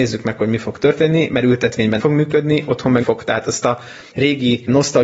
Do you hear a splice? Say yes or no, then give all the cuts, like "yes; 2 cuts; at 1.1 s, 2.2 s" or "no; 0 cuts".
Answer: yes; 2 cuts; at 2.0 s, 3.0 s